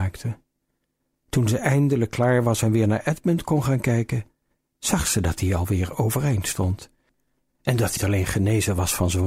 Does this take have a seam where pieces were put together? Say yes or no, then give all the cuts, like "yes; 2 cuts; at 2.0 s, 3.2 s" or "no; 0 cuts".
yes; 1 cut; at 8.0 s